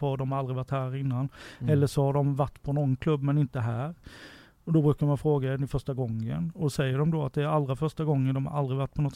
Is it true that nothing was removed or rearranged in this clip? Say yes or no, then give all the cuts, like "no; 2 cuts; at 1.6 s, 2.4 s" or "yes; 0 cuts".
yes; 0 cuts